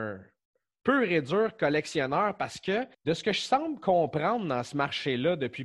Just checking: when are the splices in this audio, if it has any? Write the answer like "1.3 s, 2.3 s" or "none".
2.9 s